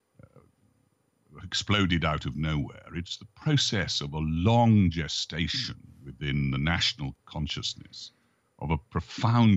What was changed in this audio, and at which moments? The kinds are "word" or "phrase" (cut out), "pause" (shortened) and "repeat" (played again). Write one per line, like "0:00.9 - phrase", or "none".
none